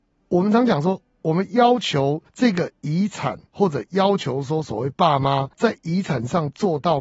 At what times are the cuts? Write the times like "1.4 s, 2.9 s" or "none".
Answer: 2.3 s, 3.5 s, 5.5 s